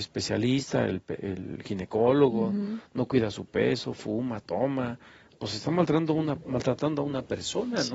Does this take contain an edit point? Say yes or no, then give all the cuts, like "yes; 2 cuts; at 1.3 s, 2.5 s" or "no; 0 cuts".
no; 0 cuts